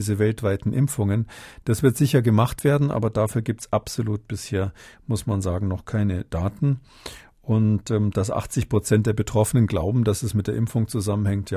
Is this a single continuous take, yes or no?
yes